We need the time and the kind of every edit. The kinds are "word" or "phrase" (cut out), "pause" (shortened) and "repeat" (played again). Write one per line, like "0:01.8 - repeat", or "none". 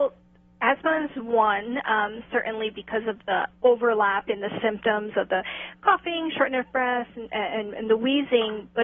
none